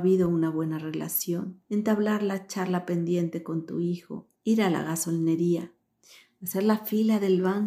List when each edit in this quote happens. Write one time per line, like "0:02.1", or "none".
0:01.6
0:04.4